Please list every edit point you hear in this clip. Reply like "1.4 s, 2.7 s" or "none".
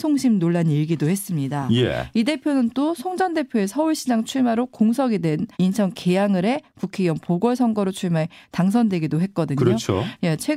5.5 s